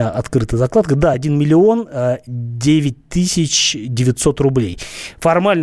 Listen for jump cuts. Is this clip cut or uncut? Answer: uncut